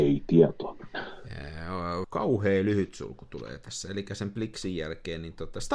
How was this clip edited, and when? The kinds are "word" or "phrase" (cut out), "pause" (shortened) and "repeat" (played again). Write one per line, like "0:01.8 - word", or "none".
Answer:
0:02.0 - word